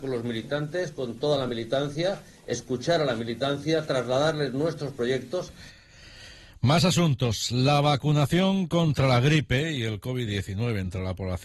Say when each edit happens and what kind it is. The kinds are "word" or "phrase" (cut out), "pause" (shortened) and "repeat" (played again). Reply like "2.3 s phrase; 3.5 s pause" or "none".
none